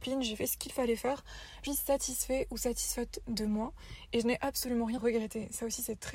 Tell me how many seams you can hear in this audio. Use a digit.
2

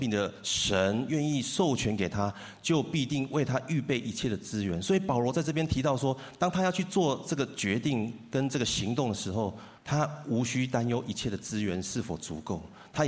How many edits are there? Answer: 1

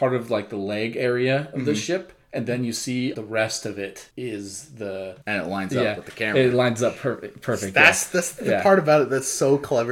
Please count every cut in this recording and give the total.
3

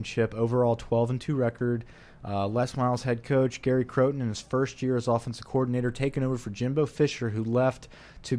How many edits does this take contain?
0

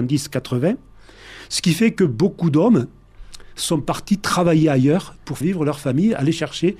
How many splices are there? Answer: 1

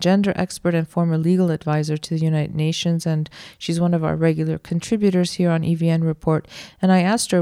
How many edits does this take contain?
0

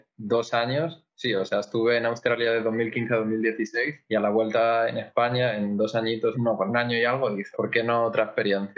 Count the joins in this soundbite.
3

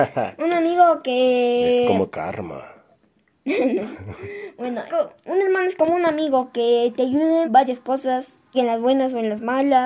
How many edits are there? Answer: 4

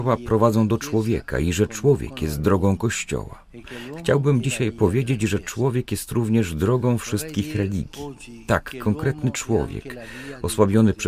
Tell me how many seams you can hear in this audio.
0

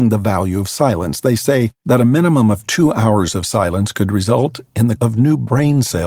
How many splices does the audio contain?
1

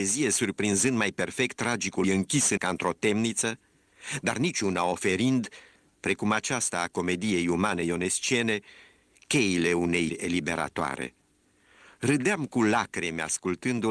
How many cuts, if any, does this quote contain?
3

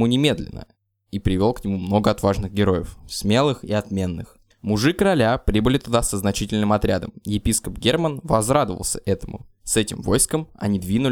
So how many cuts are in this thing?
2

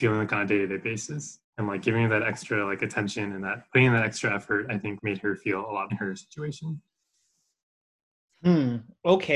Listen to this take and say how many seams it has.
3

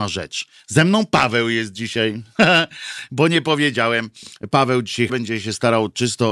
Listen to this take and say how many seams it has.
1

